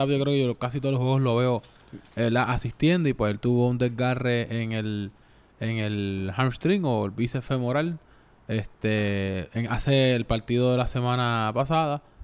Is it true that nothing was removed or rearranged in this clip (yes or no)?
yes